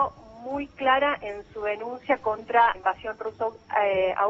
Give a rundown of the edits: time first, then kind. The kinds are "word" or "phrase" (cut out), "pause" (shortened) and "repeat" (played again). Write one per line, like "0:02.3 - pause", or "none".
0:02.7 - word

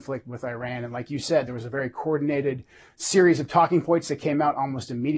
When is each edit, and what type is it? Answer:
none

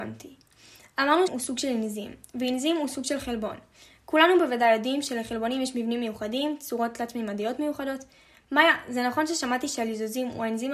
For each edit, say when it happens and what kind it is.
0:01.3 - word

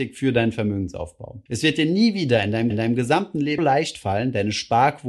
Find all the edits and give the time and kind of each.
0:01.5 - pause
0:02.7 - repeat
0:03.6 - word

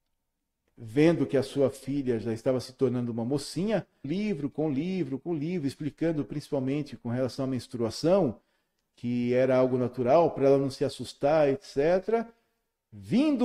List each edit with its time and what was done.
0:04.0 - phrase

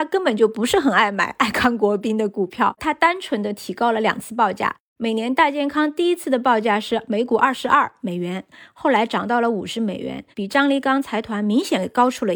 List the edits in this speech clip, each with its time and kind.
0:02.8 - phrase
0:10.3 - pause

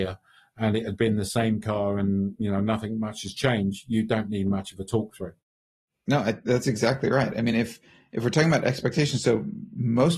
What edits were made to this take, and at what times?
none

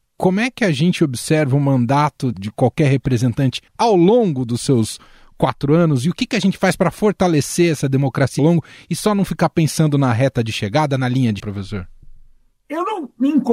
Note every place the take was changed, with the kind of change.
0:02.3 - word
0:03.7 - pause
0:08.4 - word
0:11.4 - word

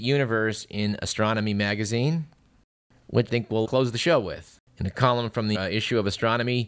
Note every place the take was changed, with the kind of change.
0:03.3 - word
0:03.6 - word
0:04.7 - pause
0:05.5 - word

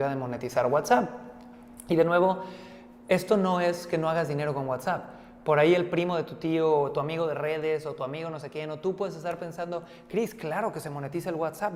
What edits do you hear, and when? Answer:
none

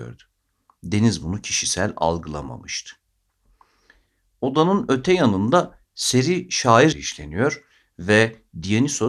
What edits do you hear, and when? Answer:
0:06.9 - word

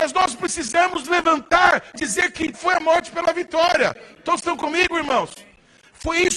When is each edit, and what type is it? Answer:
0:01.0 - word
0:01.9 - word
0:02.5 - word

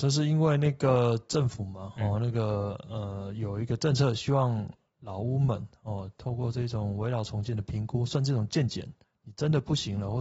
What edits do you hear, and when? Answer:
none

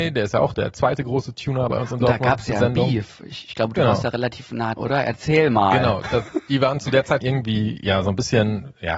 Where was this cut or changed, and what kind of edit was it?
0:04.8 - word
0:07.2 - word

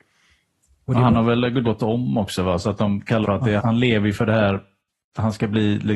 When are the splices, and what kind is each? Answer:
0:01.6 - word
0:03.2 - word
0:03.6 - word

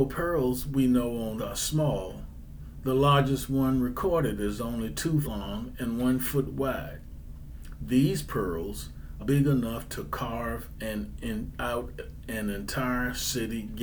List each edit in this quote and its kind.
0:01.4 - word
0:05.2 - word
0:09.2 - word

